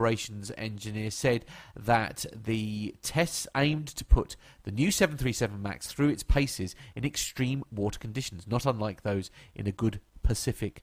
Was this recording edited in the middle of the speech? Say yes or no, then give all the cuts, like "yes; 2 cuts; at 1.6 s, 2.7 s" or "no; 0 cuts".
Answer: no; 0 cuts